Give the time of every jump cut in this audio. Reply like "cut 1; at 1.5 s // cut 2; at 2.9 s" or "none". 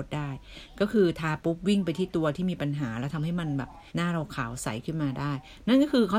cut 1; at 3.9 s